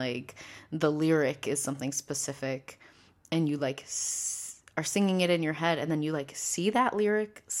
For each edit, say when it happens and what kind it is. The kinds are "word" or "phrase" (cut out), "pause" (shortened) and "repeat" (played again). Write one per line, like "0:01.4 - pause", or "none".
none